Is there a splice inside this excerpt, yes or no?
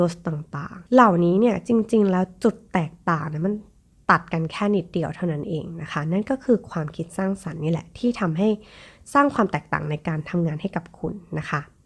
no